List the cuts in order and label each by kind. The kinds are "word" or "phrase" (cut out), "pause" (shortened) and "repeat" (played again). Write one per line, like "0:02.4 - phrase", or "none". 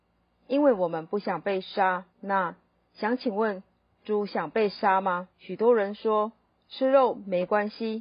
0:02.1 - pause
0:05.3 - pause